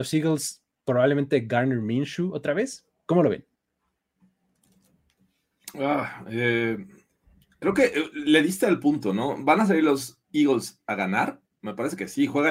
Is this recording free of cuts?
yes; 0 cuts

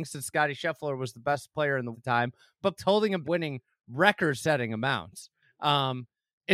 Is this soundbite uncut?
no; 3 cuts; at 1.9 s, 2.8 s, 3.2 s

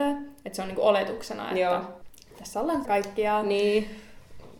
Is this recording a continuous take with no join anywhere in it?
no; 1 cut; at 2.8 s

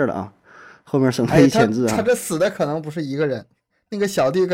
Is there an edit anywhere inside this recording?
no; 0 cuts

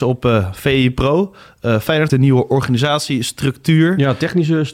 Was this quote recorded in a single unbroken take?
no; 1 cut; at 2.1 s

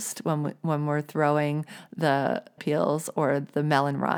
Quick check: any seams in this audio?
yes; 1 cut; at 2.6 s

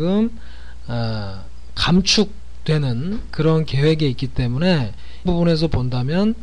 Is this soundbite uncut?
no; 1 cut; at 5.3 s

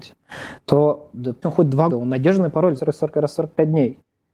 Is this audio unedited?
no; 3 cuts; at 1.4 s, 1.9 s, 2.8 s

